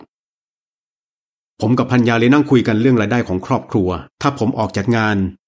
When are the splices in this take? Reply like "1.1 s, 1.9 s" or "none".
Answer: 4.1 s